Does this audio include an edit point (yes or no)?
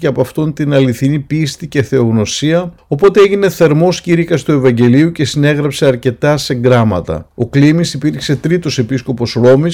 no